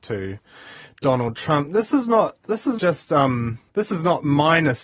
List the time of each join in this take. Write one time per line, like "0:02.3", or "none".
0:02.8
0:03.7